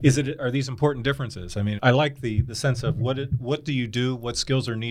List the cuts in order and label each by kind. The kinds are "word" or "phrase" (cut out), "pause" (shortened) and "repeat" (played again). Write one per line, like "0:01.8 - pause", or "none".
0:01.8 - word